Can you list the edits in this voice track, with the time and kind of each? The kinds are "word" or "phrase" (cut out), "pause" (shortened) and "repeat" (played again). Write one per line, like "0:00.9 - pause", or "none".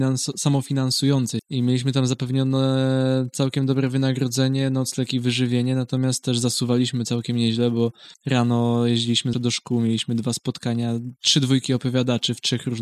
0:01.4 - word
0:08.1 - pause
0:09.3 - word

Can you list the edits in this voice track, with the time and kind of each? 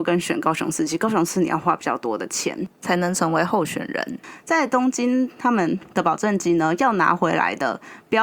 0:05.9 - pause

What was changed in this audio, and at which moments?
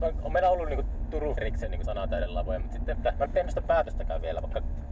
0:01.4 - word
0:01.8 - word
0:02.9 - phrase
0:03.3 - word

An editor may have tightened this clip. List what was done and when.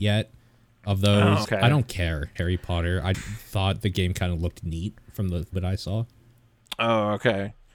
0:01.4 - word
0:02.4 - word
0:03.1 - word
0:05.5 - word

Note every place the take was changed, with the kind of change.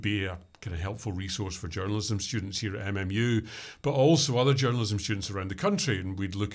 none

